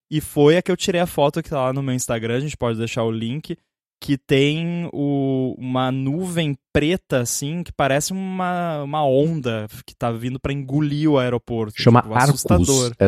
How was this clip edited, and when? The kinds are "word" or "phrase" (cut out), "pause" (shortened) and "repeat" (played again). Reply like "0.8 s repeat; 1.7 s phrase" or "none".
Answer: none